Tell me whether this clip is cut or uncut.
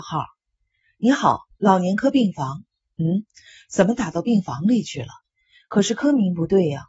uncut